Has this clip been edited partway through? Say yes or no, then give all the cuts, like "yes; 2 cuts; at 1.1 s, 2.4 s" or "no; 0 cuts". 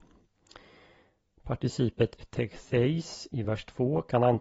no; 0 cuts